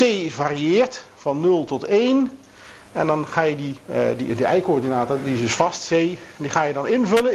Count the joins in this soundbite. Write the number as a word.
one